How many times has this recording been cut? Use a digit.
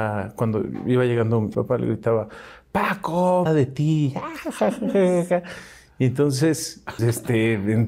3